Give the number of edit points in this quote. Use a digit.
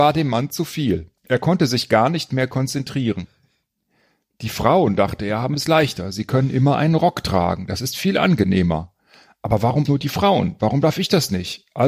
2